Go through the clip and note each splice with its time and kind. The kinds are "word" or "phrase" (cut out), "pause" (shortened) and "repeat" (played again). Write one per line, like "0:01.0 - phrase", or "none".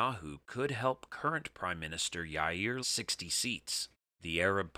0:02.8 - phrase